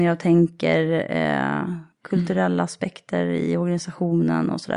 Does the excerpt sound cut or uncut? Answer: cut